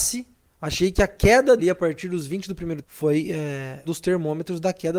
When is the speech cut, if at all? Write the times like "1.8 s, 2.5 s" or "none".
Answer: 1.6 s, 2.8 s, 3.8 s